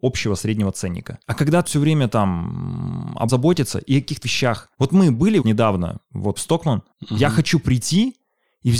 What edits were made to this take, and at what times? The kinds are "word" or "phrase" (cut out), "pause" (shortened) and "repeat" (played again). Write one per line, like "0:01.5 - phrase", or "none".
0:01.2 - pause
0:01.7 - word
0:03.3 - word
0:04.2 - word
0:04.7 - pause
0:05.4 - word
0:06.4 - word
0:06.9 - pause